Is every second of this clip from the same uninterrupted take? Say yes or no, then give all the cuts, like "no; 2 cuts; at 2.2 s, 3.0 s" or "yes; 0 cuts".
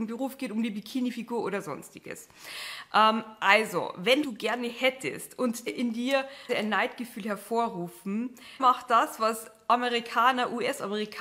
no; 4 cuts; at 4.2 s, 5.7 s, 6.5 s, 8.6 s